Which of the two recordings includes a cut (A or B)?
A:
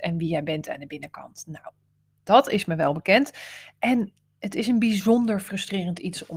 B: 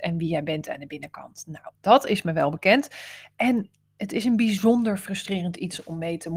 B